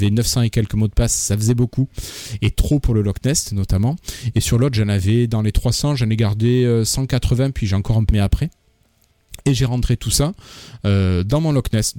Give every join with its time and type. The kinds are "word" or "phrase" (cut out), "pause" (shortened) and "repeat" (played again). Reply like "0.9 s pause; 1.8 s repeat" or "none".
8.1 s word